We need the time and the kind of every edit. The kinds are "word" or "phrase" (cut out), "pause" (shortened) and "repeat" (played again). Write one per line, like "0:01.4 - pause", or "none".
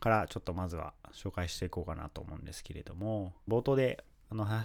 0:03.5 - phrase